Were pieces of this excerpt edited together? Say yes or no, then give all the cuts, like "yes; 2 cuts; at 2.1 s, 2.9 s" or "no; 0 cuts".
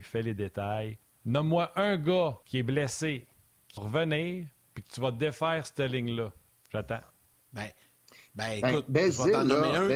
yes; 4 cuts; at 1.0 s, 2.4 s, 3.8 s, 6.5 s